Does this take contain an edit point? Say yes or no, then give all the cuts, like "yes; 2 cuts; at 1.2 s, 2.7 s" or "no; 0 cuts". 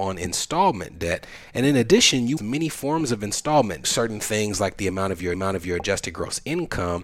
yes; 3 cuts; at 2.4 s, 3.8 s, 5.3 s